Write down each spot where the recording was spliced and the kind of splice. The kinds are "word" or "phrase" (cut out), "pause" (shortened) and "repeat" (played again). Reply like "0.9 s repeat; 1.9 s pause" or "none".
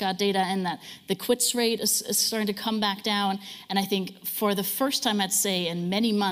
none